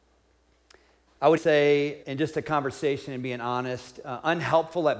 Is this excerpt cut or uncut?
cut